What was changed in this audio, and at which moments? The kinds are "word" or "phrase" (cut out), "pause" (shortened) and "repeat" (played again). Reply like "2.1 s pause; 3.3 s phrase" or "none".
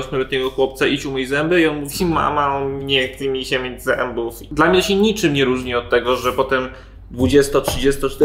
none